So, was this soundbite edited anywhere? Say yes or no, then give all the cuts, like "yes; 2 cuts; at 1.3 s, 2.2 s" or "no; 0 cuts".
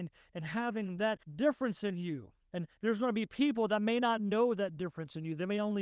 yes; 1 cut; at 1.2 s